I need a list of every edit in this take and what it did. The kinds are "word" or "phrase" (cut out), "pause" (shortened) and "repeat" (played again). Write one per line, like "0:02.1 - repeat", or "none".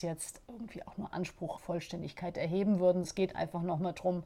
0:01.1 - word
0:01.6 - word
0:03.0 - word